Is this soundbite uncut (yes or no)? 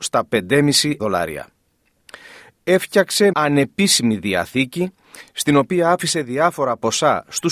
no